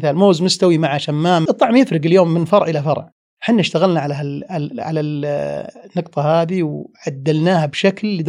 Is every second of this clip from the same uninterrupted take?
yes; 0 cuts

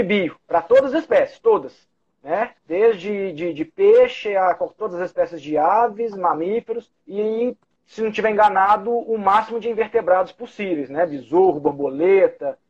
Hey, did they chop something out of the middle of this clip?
yes; 2 cuts; at 2.6 s, 7.0 s

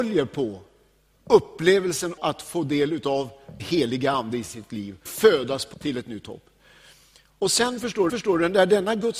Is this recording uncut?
no; 5 cuts; at 2.2 s, 3.6 s, 5.1 s, 5.7 s, 8.1 s

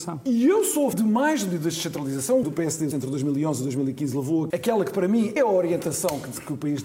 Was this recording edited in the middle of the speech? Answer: yes; 5 cuts; at 0.9 s, 2.4 s, 2.9 s, 4.5 s, 5.4 s

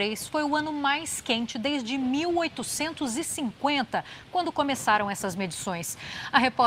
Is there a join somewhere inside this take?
no; 0 cuts

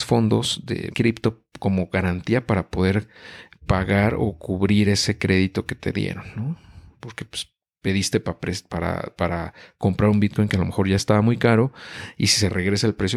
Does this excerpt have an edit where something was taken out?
yes; 1 cut; at 0.9 s

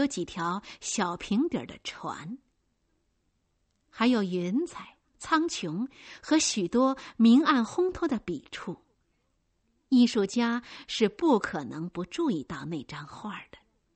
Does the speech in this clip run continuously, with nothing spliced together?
yes; 0 cuts

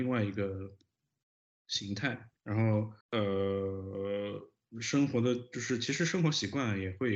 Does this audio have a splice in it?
yes; 2 cuts; at 2.4 s, 3.0 s

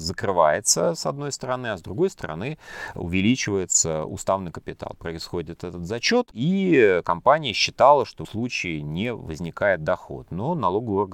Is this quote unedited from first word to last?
no; 1 cut; at 8.2 s

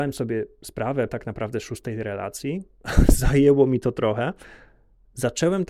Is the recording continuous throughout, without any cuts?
no; 1 cut; at 1.1 s

